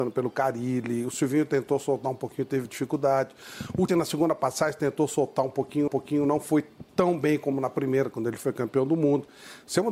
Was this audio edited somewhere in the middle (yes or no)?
yes